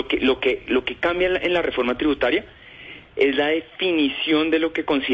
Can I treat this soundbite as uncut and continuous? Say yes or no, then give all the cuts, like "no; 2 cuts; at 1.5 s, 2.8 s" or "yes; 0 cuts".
yes; 0 cuts